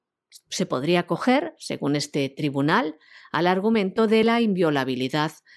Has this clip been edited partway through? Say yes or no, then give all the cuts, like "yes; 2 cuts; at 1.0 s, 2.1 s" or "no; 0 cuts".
no; 0 cuts